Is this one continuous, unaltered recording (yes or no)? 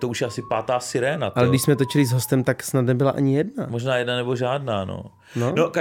yes